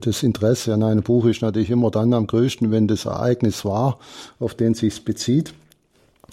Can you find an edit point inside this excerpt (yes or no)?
no